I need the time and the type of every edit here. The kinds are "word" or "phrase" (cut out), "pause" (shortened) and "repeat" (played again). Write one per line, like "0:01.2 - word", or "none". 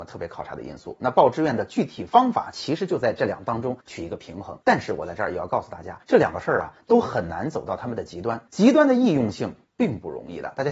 0:03.8 - pause
0:04.6 - pause
0:06.0 - pause
0:08.5 - pause